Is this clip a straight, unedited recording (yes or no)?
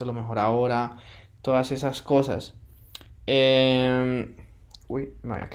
yes